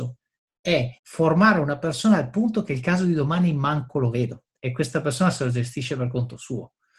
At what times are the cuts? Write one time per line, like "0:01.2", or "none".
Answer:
0:01.0
0:04.6